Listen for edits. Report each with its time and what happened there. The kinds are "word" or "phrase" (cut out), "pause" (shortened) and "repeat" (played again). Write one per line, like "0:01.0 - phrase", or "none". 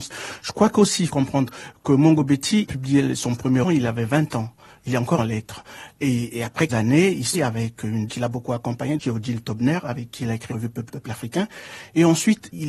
0:01.1 - word
0:02.6 - word
0:03.6 - word
0:05.2 - word
0:06.7 - word
0:07.3 - word
0:08.1 - word
0:10.5 - word
0:10.9 - word